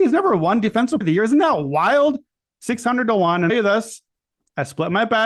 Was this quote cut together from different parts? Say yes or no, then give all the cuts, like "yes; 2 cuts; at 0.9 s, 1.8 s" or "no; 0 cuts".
yes; 2 cuts; at 1.0 s, 3.5 s